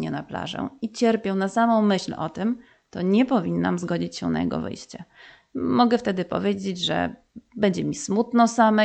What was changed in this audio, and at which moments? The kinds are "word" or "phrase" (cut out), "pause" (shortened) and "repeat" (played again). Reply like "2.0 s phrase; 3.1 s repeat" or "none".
none